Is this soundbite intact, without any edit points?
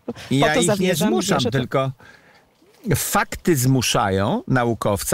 yes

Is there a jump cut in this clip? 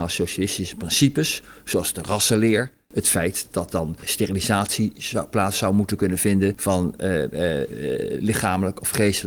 no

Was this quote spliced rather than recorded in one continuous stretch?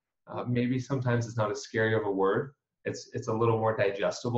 no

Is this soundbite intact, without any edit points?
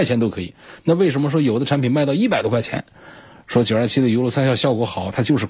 yes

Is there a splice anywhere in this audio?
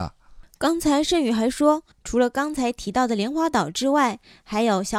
yes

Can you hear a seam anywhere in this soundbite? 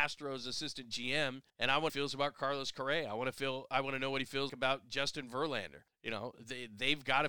yes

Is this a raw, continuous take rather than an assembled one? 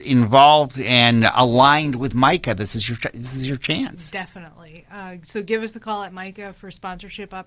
yes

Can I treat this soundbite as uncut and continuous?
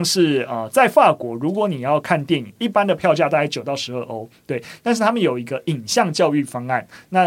yes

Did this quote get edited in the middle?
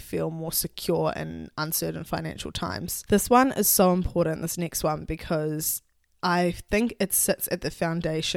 no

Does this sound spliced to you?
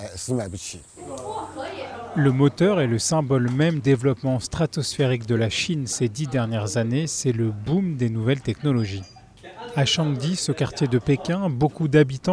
yes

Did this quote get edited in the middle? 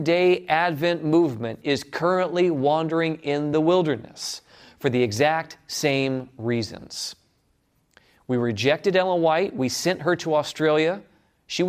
no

